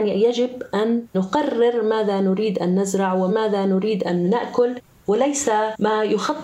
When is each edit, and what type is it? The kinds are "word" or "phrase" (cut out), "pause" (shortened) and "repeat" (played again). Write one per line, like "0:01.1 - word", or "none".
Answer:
none